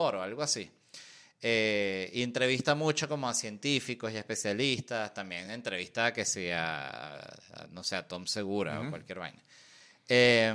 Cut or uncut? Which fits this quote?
uncut